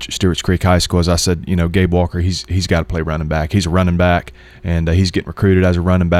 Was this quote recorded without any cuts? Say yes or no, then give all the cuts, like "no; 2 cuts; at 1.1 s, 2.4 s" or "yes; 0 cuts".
yes; 0 cuts